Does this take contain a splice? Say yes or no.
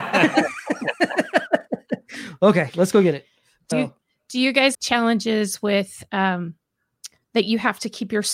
yes